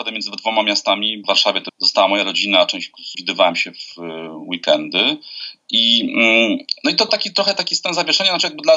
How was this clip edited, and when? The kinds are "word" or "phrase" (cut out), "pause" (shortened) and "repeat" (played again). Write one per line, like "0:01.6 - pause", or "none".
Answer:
0:01.2 - word
0:01.7 - word
0:03.1 - word
0:07.1 - word